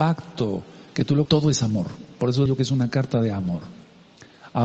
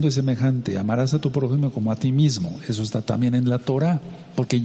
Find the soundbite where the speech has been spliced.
first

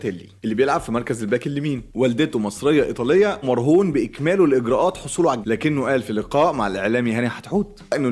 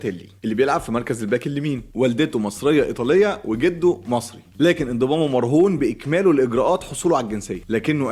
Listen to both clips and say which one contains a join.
first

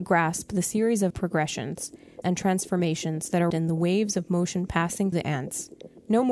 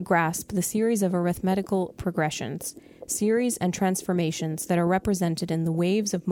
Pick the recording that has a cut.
first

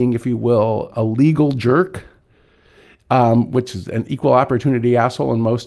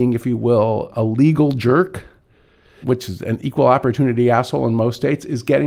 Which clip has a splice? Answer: second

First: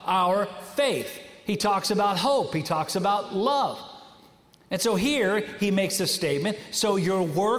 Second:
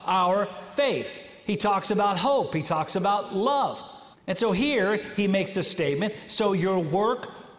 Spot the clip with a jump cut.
second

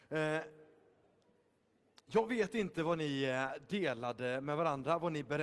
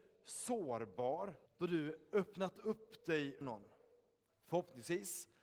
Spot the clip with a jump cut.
second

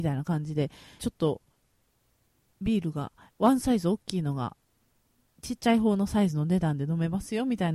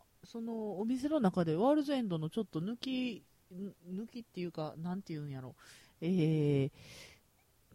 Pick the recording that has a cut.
first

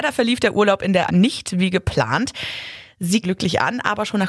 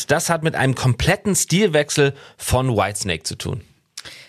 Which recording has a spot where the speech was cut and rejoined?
first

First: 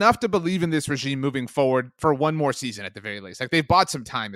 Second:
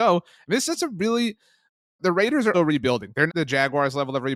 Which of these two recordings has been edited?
second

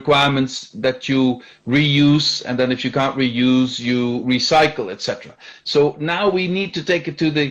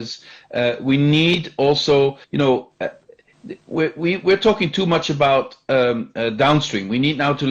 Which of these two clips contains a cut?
second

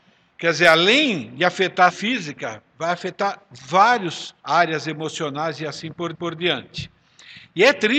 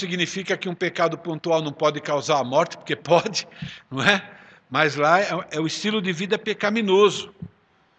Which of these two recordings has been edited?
first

